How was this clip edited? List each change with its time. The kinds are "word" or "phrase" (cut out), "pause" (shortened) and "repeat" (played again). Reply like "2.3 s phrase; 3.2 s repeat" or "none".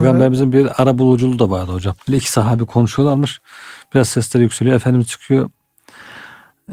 2.0 s pause